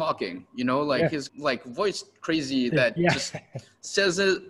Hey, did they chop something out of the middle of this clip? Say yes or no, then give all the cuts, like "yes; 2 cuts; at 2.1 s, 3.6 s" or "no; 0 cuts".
yes; 2 cuts; at 1.3 s, 2.7 s